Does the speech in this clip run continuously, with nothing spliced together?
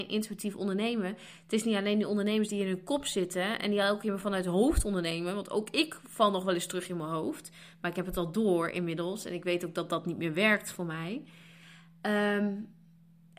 yes; 0 cuts

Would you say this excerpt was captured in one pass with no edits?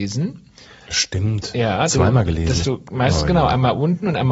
no; 2 cuts; at 1.9 s, 2.6 s

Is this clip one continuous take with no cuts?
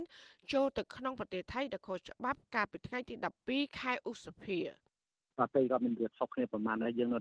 yes; 0 cuts

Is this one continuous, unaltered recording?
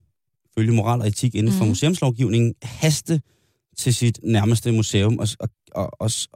yes; 0 cuts

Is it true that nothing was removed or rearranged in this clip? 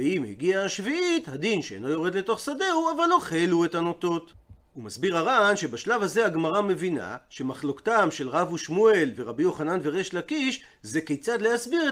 yes; 0 cuts

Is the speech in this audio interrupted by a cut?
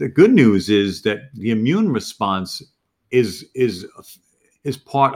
no; 0 cuts

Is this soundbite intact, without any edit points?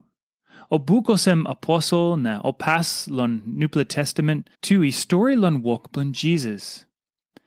no; 1 cut; at 4.5 s

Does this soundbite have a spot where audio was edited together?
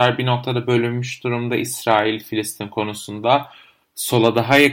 no; 0 cuts

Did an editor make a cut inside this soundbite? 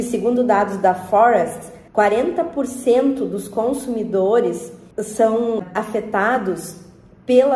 yes; 2 cuts; at 1.9 s, 4.9 s

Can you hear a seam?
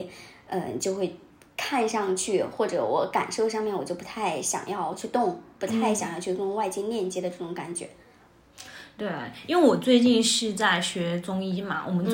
no; 0 cuts

